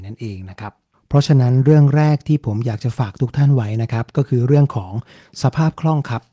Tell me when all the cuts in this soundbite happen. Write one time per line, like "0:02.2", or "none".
0:00.9